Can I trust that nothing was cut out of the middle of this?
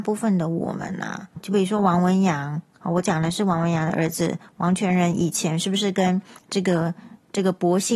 no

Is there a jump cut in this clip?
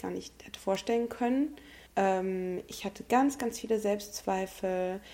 yes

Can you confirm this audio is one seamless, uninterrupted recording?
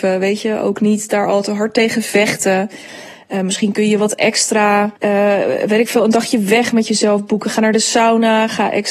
no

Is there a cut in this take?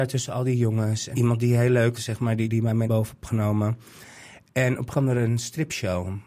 yes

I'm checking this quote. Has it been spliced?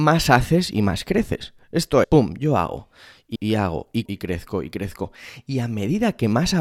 yes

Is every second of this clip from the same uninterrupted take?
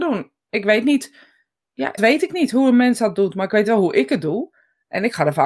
no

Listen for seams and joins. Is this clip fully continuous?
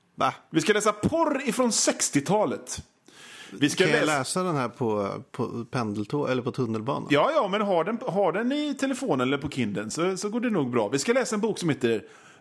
yes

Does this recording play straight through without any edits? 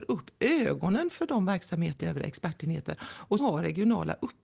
no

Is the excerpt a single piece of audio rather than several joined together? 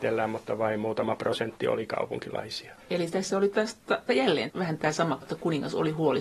no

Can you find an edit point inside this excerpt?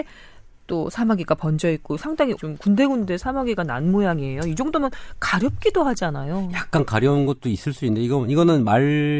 yes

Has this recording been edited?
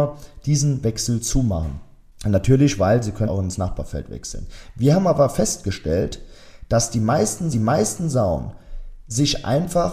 yes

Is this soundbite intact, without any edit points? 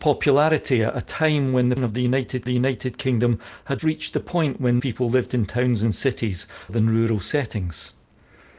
no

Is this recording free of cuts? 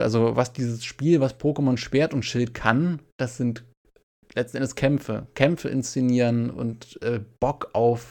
yes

